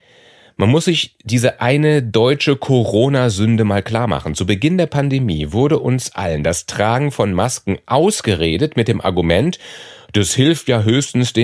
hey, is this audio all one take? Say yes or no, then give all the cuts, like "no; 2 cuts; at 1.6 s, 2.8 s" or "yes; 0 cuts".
yes; 0 cuts